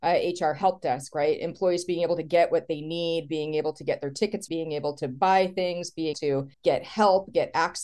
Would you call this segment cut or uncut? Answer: cut